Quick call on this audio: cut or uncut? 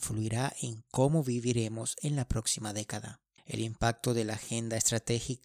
cut